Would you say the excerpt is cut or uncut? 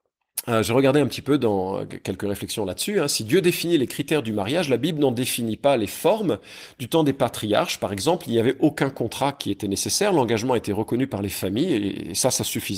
uncut